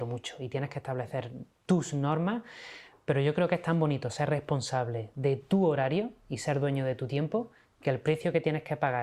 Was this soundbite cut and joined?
no; 0 cuts

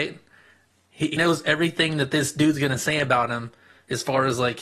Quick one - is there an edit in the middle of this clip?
yes; 1 cut; at 1.2 s

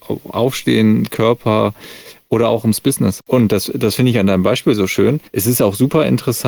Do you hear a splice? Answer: yes; 1 cut; at 5.3 s

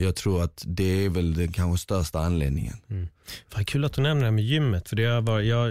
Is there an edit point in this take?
no; 0 cuts

